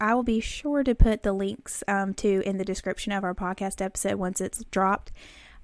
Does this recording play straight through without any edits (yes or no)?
yes